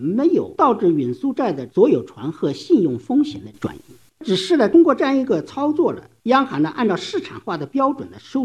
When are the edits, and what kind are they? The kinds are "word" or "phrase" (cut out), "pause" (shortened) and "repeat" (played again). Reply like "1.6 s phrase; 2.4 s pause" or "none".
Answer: none